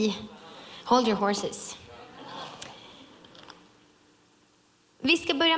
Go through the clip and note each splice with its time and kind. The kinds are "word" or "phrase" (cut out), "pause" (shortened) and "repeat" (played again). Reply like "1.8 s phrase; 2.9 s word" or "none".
none